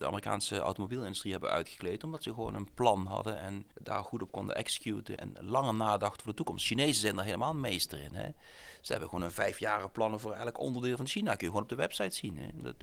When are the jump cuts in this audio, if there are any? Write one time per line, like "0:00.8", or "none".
0:03.7
0:05.2